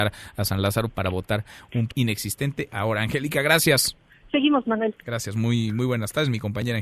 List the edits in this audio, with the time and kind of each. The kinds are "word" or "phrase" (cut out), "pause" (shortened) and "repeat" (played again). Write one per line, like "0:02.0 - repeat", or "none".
0:01.9 - word
0:02.7 - word
0:04.6 - word

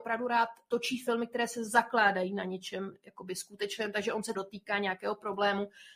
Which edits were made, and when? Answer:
0:04.3 - word

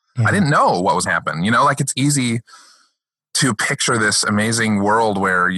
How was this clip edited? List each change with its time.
0:01.1 - word

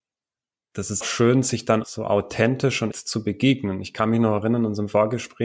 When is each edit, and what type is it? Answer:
0:01.0 - word
0:01.8 - word
0:02.9 - word

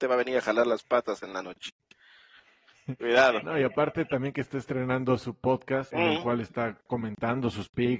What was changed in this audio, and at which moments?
0:05.9 - word

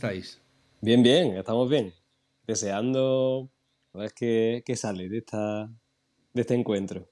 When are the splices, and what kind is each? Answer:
0:03.9 - phrase

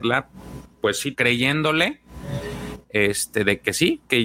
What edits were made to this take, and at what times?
0:01.1 - word

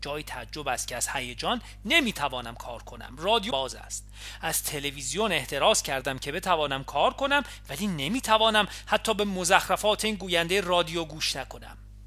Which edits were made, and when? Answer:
0:03.5 - word

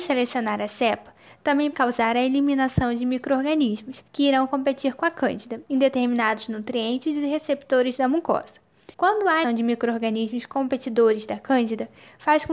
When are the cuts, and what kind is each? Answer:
0:01.7 - word
0:04.1 - pause
0:08.9 - pause
0:09.4 - word

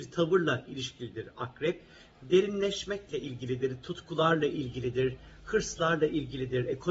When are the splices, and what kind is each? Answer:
none

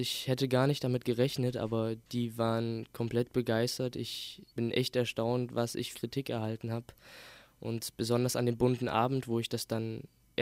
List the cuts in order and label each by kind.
0:02.0 - pause
0:04.5 - pause
0:05.9 - phrase

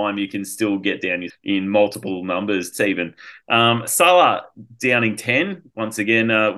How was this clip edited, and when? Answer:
0:01.3 - word
0:02.7 - phrase

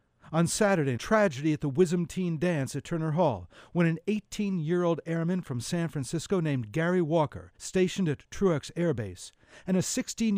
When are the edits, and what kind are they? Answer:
0:01.0 - word
0:07.6 - pause

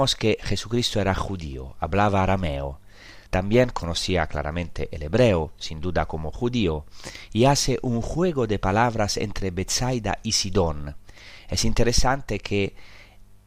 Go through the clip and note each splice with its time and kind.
0:03.3 - pause

